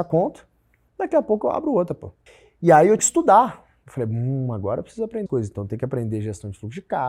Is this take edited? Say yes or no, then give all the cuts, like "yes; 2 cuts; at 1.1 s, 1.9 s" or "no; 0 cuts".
yes; 3 cuts; at 2.3 s, 3.0 s, 5.3 s